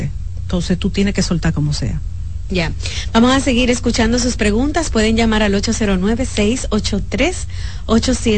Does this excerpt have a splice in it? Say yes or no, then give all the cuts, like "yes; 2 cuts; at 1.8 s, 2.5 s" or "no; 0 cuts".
no; 0 cuts